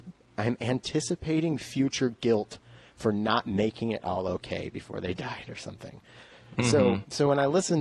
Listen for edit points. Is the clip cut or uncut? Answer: uncut